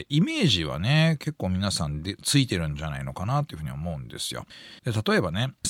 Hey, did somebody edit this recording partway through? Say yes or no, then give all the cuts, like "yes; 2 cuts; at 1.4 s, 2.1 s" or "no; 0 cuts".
yes; 1 cut; at 4.8 s